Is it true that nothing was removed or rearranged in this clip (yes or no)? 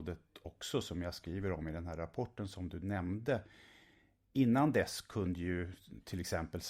yes